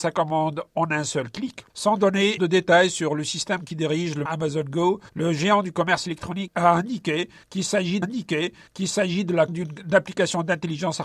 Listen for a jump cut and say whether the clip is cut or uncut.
cut